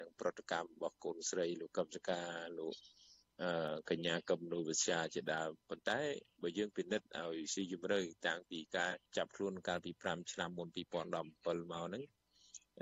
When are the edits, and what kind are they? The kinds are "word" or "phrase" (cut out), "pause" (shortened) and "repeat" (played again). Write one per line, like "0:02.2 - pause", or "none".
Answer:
0:09.1 - pause